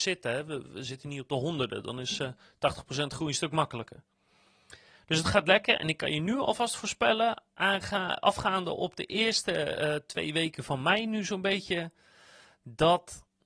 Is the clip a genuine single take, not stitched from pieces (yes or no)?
yes